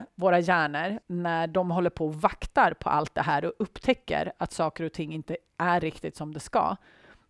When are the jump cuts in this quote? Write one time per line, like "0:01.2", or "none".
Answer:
0:01.0